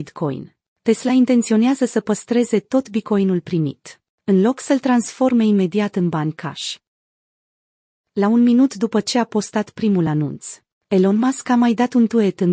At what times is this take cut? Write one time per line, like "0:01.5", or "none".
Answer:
none